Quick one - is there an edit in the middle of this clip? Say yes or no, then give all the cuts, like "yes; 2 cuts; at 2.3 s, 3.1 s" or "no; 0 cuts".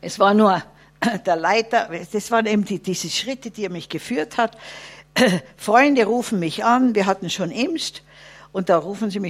no; 0 cuts